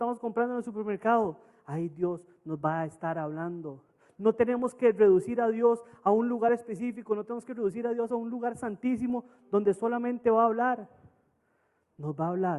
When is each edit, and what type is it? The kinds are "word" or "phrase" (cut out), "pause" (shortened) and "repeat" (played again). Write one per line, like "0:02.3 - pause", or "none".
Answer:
none